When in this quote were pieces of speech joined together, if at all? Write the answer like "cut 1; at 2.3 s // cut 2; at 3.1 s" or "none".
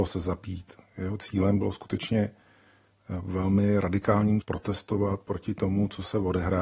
cut 1; at 4.4 s